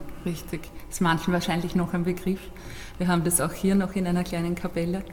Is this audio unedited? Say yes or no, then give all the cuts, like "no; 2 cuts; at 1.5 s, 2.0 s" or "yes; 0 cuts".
yes; 0 cuts